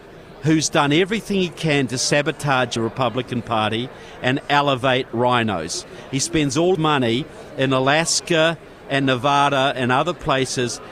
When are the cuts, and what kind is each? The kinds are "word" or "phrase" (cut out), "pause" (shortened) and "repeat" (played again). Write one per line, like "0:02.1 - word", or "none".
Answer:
0:02.8 - phrase
0:06.7 - word